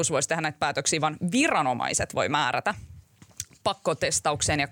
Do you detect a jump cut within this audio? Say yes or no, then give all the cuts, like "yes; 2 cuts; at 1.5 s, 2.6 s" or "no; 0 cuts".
no; 0 cuts